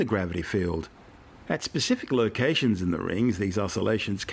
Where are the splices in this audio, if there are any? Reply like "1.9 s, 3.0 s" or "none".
none